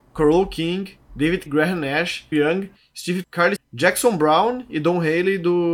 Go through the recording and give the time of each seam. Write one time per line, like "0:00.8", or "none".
0:01.5
0:02.3
0:03.2
0:03.6